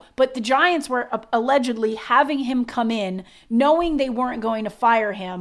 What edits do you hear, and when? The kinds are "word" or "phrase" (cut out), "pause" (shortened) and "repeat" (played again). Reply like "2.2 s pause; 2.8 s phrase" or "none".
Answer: none